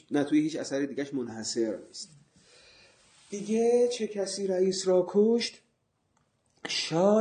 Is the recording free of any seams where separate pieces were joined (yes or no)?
yes